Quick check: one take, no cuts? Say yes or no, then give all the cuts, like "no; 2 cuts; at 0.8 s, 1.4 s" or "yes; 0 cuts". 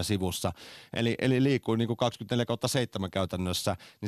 yes; 0 cuts